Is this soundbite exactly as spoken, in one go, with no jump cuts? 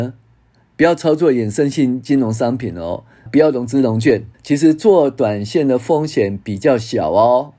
no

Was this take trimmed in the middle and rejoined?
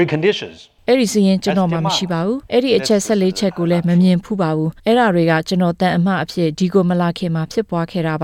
yes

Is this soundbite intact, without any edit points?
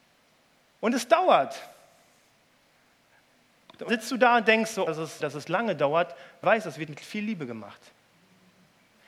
no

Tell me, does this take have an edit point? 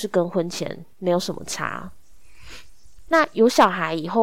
yes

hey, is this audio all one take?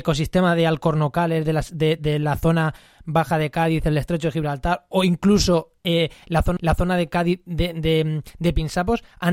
no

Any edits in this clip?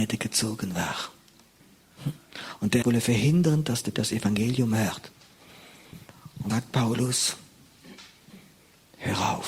yes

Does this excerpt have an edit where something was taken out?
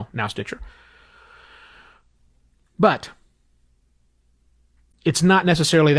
no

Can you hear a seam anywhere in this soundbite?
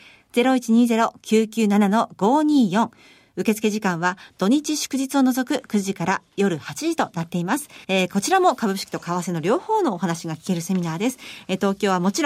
yes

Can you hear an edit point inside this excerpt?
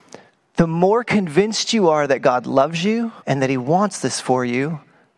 yes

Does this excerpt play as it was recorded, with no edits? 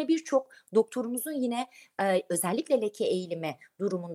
yes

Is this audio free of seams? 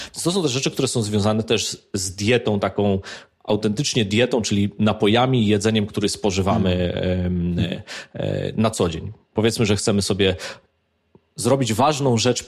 yes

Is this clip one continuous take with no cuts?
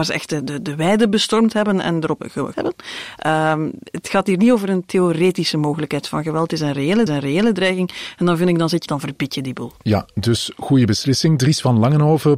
no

